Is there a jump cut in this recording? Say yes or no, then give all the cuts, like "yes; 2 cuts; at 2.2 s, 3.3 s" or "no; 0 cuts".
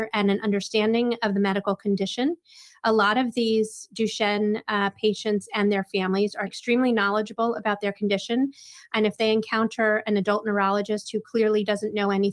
no; 0 cuts